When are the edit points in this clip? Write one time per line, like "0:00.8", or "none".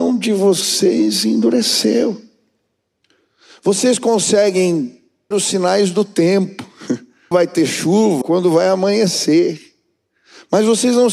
0:05.3
0:07.3
0:08.2

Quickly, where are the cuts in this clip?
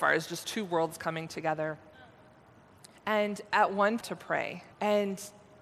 0:03.0
0:04.0
0:04.7

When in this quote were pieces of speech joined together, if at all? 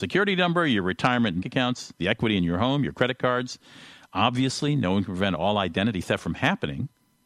0:01.4

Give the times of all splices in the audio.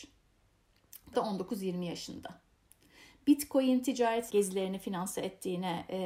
0:01.1
0:04.3

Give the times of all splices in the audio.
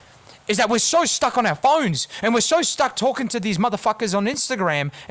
none

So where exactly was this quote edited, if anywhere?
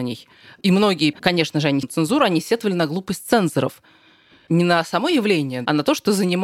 0:01.1
0:01.8

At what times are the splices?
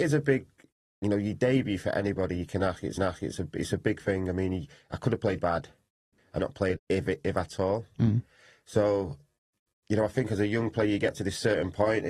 0:03.0
0:05.4
0:06.4
0:06.8

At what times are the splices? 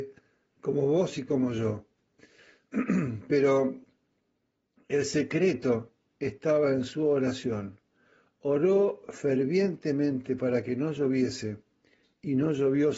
none

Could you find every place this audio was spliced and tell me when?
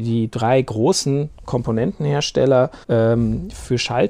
0:02.8

